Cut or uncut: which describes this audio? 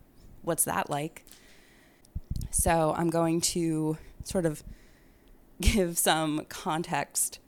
uncut